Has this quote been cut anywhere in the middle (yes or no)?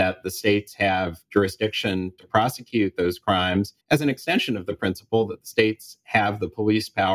yes